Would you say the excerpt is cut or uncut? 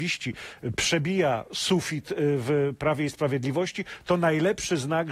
uncut